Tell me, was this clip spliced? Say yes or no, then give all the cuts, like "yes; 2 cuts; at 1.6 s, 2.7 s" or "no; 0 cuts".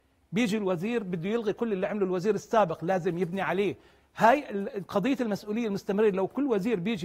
no; 0 cuts